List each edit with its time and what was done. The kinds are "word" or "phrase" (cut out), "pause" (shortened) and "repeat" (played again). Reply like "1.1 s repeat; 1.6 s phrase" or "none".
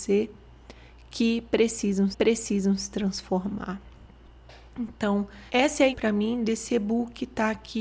2.1 s repeat; 5.5 s pause; 5.9 s word